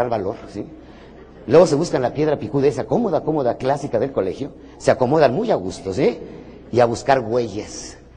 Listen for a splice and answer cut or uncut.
uncut